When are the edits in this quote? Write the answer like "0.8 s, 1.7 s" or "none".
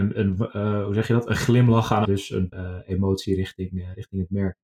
2.1 s, 2.5 s